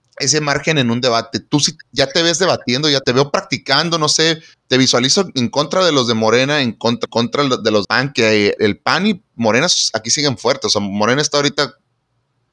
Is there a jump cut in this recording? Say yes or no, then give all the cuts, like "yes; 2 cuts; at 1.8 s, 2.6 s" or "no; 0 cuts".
yes; 5 cuts; at 3.0 s, 4.5 s, 7.1 s, 7.8 s, 8.6 s